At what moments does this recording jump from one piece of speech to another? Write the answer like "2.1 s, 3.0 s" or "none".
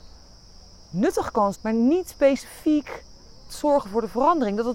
1.5 s, 3.5 s